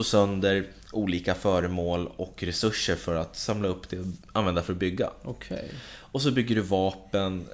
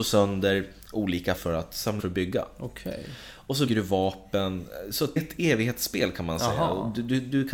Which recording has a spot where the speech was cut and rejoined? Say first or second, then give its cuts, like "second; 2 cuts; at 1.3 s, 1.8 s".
second; 4 cuts; at 1.4 s, 2.0 s, 3.7 s, 5.2 s